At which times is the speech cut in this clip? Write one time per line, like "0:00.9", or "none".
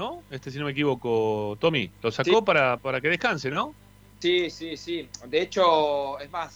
none